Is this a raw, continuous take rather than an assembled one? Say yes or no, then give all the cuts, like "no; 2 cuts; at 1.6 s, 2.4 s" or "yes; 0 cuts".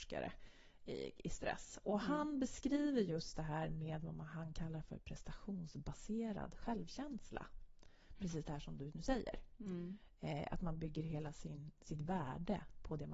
yes; 0 cuts